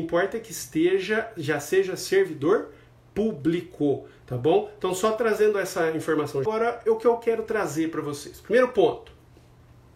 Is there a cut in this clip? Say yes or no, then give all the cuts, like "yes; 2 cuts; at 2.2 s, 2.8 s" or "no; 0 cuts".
yes; 1 cut; at 6.4 s